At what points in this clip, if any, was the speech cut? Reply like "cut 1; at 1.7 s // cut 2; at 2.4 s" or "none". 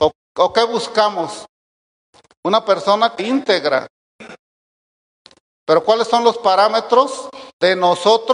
cut 1; at 3.2 s